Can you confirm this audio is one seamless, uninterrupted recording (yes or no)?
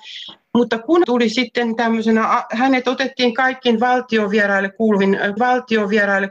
no